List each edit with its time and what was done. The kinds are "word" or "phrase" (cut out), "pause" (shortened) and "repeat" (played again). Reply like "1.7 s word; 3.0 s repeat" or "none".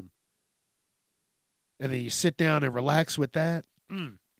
none